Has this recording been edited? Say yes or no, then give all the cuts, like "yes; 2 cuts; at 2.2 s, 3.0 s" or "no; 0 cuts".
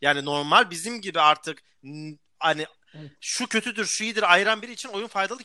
no; 0 cuts